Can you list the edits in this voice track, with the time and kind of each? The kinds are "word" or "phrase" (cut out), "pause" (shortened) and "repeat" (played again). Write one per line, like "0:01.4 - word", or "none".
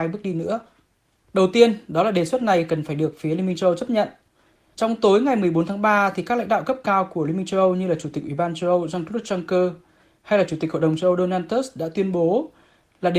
none